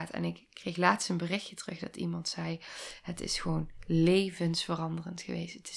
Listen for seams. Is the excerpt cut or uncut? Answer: uncut